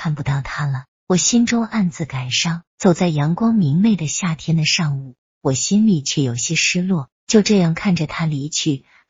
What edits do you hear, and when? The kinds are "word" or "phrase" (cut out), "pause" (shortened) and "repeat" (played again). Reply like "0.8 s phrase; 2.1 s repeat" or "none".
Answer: 0.9 s pause; 2.7 s pause; 7.2 s pause